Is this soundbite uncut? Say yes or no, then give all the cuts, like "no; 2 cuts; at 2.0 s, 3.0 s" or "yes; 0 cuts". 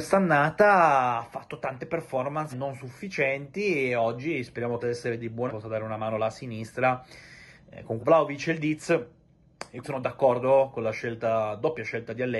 no; 5 cuts; at 2.5 s, 4.8 s, 5.5 s, 8.0 s, 9.8 s